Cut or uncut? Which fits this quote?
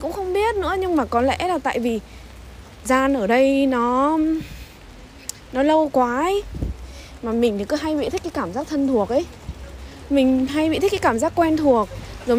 cut